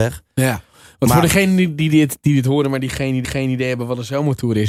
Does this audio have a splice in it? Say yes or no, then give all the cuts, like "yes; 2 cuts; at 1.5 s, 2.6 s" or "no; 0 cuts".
yes; 1 cut; at 3.2 s